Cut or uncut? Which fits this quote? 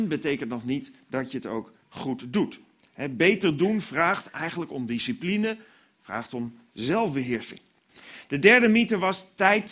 uncut